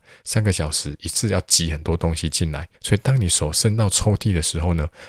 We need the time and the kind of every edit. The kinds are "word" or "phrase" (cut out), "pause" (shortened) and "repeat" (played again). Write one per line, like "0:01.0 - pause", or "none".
0:02.7 - pause